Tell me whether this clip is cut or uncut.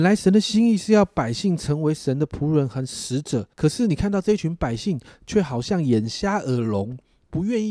cut